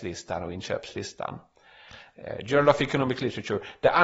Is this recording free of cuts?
yes; 0 cuts

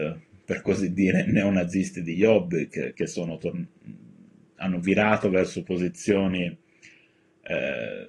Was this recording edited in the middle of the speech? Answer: no; 0 cuts

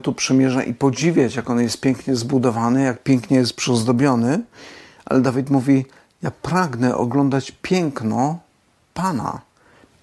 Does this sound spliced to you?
no; 0 cuts

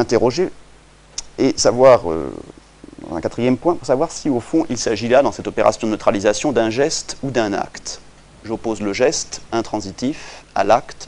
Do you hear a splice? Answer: no; 0 cuts

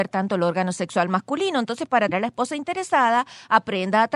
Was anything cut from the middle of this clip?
yes; 1 cut; at 2.1 s

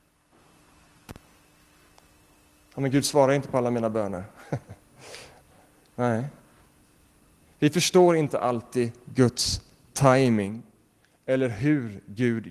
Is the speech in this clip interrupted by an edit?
no; 0 cuts

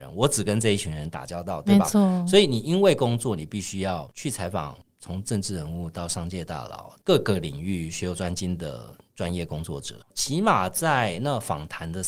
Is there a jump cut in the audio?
yes; 1 cut; at 10.0 s

